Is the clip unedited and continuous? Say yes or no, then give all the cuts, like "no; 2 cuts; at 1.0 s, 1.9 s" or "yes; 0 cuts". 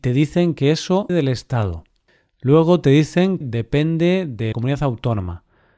no; 3 cuts; at 1.1 s, 3.4 s, 4.5 s